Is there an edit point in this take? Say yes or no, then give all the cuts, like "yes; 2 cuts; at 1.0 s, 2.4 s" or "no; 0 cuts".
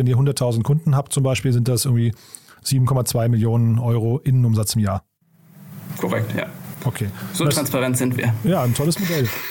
no; 0 cuts